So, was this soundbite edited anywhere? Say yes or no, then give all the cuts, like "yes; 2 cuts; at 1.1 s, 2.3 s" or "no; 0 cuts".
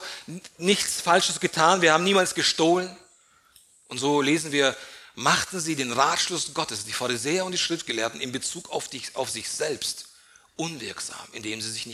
no; 0 cuts